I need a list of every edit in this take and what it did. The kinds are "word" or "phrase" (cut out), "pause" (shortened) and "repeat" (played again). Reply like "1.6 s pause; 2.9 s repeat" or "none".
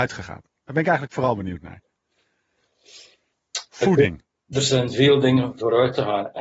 none